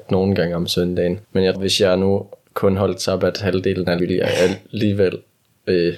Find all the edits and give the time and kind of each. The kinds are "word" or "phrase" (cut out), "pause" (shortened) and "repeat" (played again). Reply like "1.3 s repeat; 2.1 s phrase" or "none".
1.2 s pause; 1.5 s word; 2.4 s pause; 4.0 s word